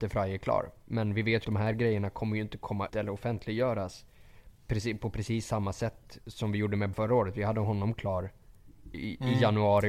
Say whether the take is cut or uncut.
cut